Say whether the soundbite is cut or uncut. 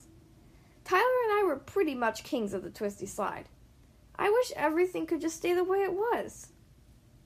uncut